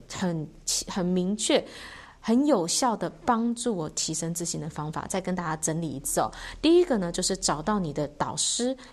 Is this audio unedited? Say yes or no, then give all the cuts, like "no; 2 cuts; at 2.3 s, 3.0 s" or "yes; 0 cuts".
yes; 0 cuts